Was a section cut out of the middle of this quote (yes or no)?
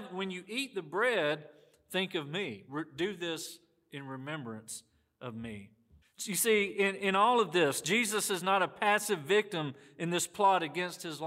yes